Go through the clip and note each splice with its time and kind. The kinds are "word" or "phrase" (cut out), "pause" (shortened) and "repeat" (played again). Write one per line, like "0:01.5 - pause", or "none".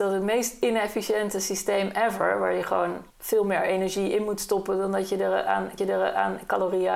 0:03.1 - pause
0:05.8 - repeat